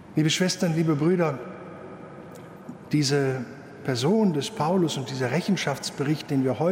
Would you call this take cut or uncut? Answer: uncut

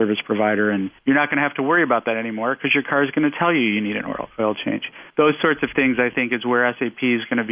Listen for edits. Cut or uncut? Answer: cut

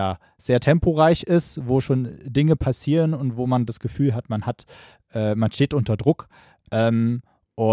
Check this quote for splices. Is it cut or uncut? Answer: uncut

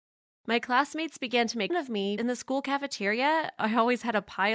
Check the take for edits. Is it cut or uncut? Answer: cut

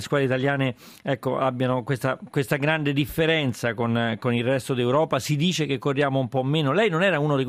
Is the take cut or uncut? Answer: uncut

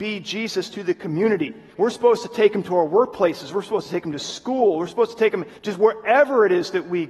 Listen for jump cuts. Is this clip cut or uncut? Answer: cut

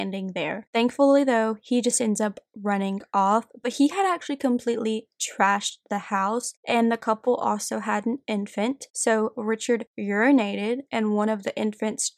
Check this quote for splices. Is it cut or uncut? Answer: uncut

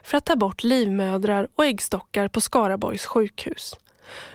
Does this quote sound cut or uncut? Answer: uncut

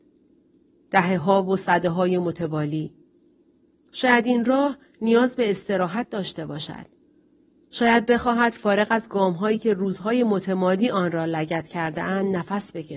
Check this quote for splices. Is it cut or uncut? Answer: uncut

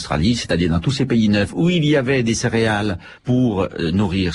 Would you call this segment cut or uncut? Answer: cut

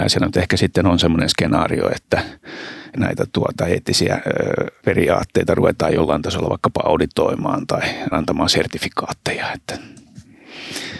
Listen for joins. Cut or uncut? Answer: cut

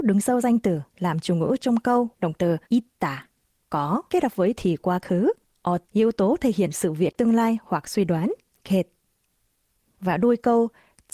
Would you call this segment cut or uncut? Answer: cut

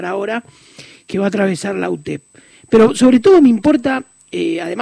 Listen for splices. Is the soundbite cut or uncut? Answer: uncut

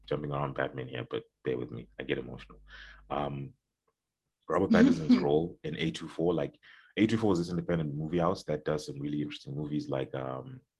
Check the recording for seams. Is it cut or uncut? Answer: uncut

